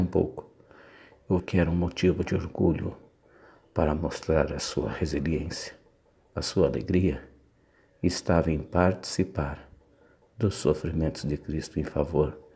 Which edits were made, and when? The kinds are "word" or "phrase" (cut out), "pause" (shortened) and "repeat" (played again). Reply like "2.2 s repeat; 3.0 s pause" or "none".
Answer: 1.4 s word